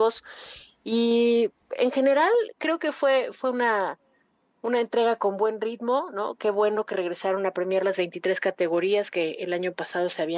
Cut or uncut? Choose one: uncut